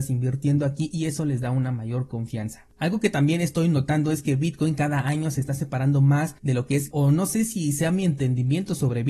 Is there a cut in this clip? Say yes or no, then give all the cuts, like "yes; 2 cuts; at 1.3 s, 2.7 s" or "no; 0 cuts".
yes; 2 cuts; at 6.4 s, 6.9 s